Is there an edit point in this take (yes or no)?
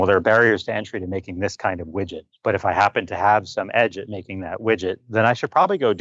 yes